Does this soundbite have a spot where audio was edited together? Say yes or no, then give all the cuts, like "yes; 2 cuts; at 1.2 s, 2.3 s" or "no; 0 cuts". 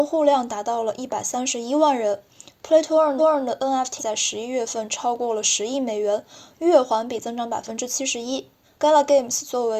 yes; 3 cuts; at 3.2 s, 4.0 s, 8.6 s